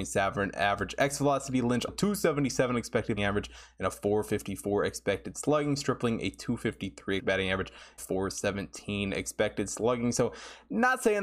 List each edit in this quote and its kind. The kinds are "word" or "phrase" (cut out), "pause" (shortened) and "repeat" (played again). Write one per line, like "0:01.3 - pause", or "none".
0:01.9 - word
0:03.2 - word
0:07.2 - word
0:08.0 - word